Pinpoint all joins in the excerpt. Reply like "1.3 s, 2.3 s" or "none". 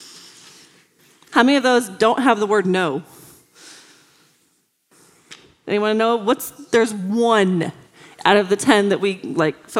none